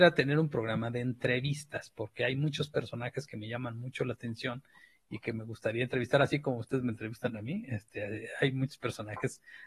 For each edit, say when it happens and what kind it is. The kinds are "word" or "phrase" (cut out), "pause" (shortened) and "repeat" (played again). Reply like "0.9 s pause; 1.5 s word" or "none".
none